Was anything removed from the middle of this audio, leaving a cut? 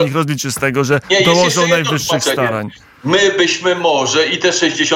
no; 0 cuts

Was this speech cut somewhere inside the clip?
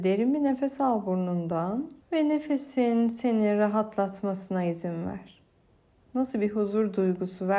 yes; 1 cut; at 2.0 s

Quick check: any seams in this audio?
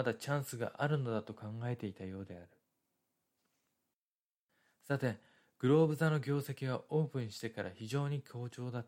no; 0 cuts

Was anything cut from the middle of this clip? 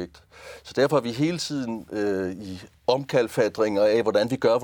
no; 0 cuts

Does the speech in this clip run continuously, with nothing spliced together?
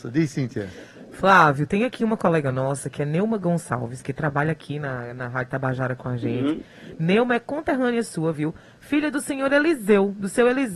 yes; 0 cuts

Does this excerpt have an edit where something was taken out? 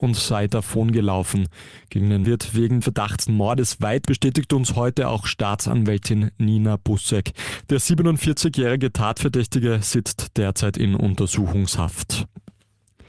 yes; 4 cuts; at 2.2 s, 2.8 s, 3.3 s, 4.0 s

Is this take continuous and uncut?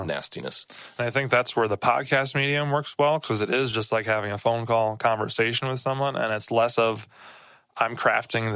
yes; 0 cuts

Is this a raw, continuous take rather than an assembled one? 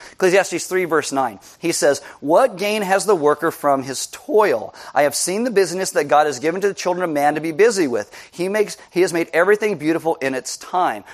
yes; 0 cuts

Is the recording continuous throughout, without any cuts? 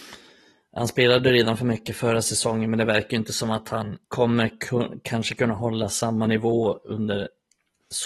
no; 1 cut; at 4.0 s

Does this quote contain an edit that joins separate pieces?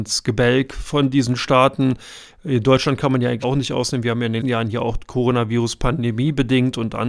yes; 2 cuts; at 3.4 s, 4.4 s

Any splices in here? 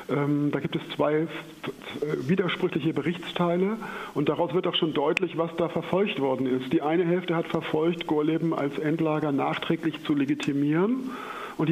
no; 0 cuts

